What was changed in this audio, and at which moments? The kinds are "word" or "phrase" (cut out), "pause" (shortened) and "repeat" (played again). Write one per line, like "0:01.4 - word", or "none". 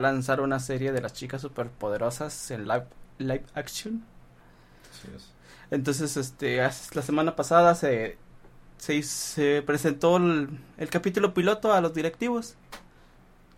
none